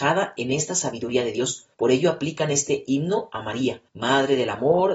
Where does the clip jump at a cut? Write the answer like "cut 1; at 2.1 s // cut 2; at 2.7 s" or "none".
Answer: cut 1; at 1.7 s // cut 2; at 3.9 s